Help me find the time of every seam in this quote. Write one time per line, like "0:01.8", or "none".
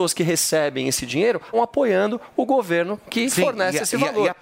0:01.5